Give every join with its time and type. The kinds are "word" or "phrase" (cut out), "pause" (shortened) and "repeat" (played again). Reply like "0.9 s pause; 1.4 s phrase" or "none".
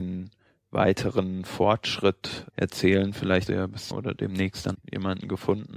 2.5 s word; 3.5 s word; 3.9 s word; 4.7 s word